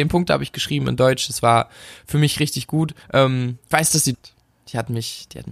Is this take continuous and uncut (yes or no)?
no